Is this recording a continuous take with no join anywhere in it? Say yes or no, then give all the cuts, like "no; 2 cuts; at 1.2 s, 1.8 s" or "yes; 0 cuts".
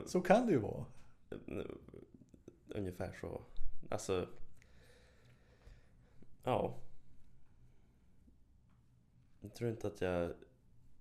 yes; 0 cuts